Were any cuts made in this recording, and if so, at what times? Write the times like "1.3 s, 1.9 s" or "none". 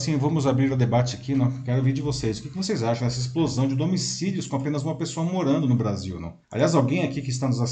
6.4 s